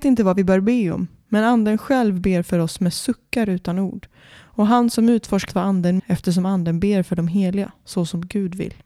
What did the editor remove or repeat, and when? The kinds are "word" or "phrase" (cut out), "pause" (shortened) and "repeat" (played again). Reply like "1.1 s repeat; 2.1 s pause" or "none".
5.5 s phrase; 6.0 s word